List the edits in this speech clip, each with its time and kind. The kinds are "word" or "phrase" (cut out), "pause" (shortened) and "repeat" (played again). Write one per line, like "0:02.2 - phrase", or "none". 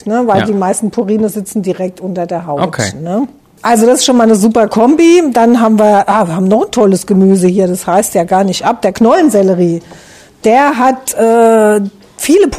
none